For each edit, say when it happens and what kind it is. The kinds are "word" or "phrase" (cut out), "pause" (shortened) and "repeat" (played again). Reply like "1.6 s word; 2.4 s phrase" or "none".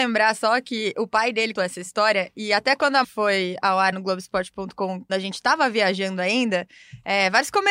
1.5 s word; 3.0 s word; 3.9 s word; 5.1 s word